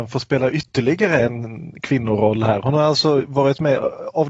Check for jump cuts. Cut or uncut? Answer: uncut